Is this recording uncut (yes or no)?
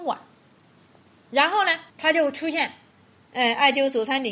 no